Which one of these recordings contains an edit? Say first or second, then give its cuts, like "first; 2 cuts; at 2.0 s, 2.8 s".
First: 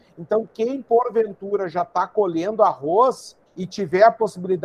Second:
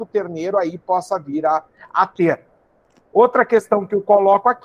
first; 1 cut; at 3.5 s